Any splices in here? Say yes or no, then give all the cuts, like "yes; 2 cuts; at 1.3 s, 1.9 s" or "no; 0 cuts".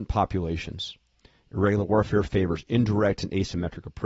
no; 0 cuts